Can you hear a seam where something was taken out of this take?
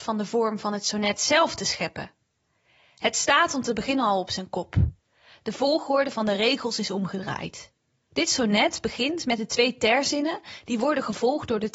no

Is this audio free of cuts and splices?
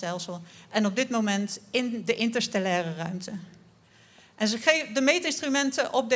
yes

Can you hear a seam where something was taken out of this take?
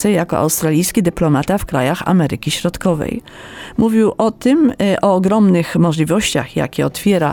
no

